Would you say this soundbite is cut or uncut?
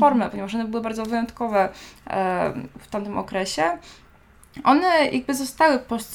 uncut